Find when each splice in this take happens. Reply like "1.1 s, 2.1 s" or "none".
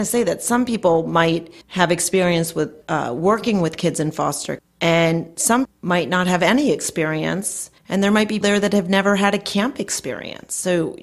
1.6 s, 2.8 s, 4.6 s, 5.6 s, 7.8 s, 8.4 s